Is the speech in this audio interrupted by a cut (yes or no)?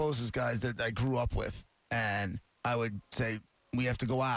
yes